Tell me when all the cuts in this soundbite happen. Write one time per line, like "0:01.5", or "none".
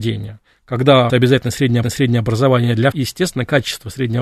0:01.1
0:01.8
0:02.9